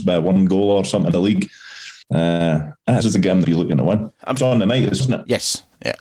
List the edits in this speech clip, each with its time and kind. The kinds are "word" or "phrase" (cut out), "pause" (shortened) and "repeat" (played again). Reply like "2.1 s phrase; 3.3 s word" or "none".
1.1 s word; 2.0 s pause; 3.0 s word; 3.4 s phrase; 4.4 s phrase; 5.0 s word

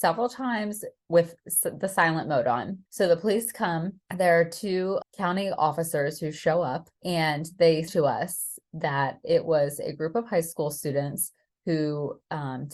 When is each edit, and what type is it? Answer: 2.9 s pause; 4.1 s pause; 5.0 s word; 6.9 s pause; 7.9 s word

